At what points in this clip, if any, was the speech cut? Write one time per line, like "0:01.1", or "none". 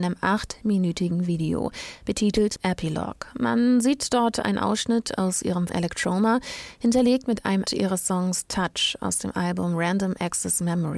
0:02.6
0:05.7
0:07.7